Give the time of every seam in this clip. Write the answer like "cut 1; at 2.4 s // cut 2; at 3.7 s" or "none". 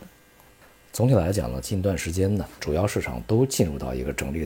cut 1; at 2.6 s